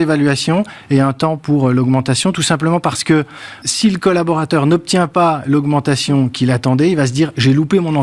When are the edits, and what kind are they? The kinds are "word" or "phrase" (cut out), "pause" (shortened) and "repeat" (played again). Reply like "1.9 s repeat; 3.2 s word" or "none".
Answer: 3.6 s word